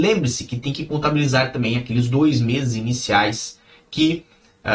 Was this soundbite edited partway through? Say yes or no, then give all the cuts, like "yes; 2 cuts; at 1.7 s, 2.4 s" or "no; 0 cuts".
no; 0 cuts